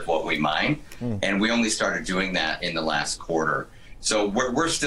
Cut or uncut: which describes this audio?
uncut